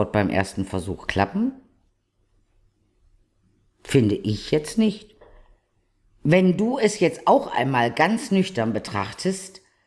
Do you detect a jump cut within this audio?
no; 0 cuts

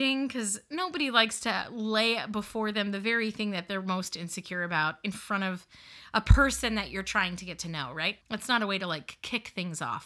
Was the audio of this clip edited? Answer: yes; 1 cut; at 8.2 s

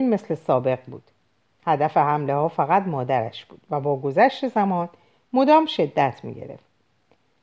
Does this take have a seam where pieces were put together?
no; 0 cuts

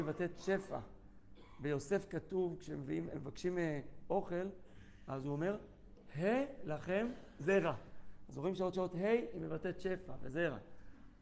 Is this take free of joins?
no; 1 cut; at 8.7 s

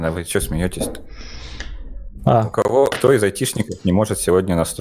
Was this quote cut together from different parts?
yes; 1 cut; at 2.9 s

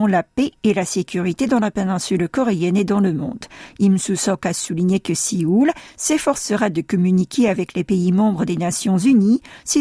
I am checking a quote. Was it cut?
no; 0 cuts

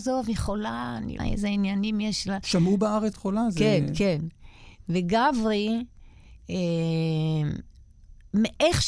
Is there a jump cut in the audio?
yes; 2 cuts; at 1.2 s, 3.1 s

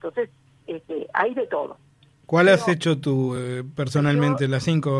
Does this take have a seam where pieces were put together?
no; 0 cuts

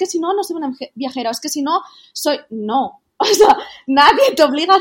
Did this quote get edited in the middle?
no; 0 cuts

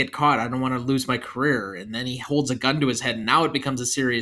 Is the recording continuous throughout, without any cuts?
yes; 0 cuts

